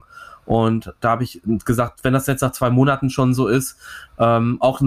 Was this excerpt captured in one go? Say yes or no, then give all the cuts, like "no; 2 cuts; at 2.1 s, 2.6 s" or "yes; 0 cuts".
yes; 0 cuts